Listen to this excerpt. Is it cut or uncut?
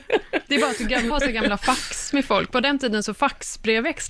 cut